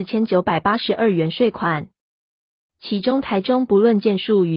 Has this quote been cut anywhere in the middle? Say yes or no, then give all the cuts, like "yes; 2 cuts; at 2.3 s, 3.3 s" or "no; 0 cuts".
no; 0 cuts